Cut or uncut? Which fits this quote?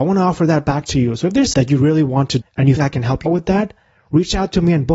cut